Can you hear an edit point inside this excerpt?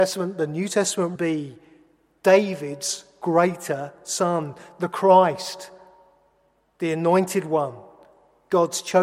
yes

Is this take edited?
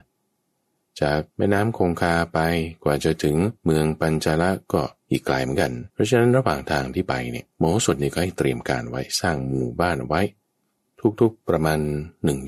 yes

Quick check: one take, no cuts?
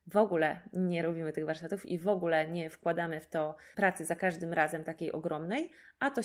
no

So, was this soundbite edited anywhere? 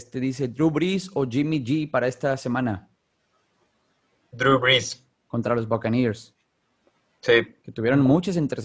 no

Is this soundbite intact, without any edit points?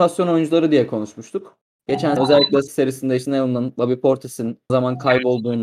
no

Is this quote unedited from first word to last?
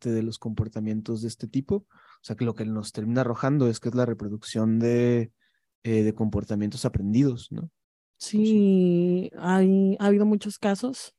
yes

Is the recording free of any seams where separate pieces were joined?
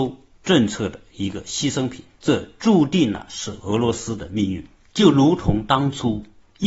yes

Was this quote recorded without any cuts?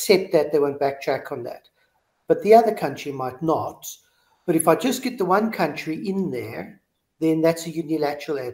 yes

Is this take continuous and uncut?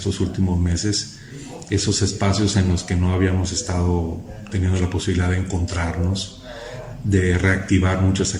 yes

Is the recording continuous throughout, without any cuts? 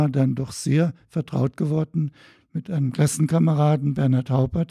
yes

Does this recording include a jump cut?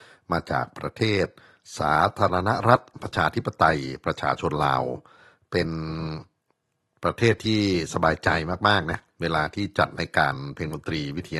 no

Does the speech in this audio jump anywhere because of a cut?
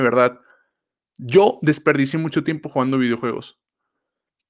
no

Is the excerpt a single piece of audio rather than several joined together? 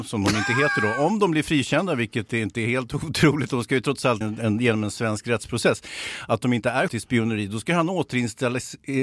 no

